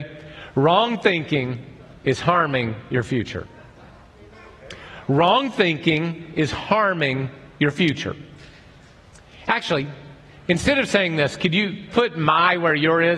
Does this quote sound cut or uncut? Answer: uncut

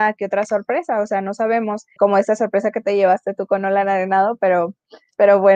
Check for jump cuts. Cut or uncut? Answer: cut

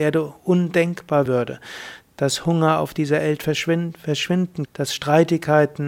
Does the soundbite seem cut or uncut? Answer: cut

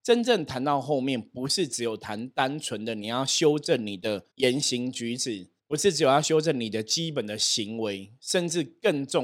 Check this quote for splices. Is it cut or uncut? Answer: cut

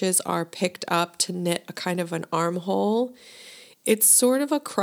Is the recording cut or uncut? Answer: uncut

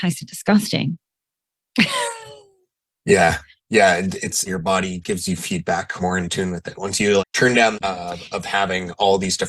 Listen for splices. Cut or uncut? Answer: cut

